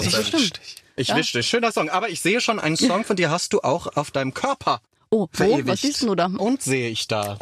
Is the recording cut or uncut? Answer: cut